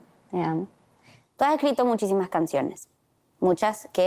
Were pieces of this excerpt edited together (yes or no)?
no